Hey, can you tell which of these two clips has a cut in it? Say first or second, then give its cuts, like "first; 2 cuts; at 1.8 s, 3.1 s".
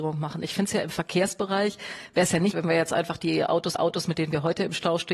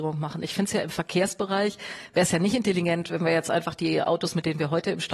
first; 2 cuts; at 2.5 s, 3.8 s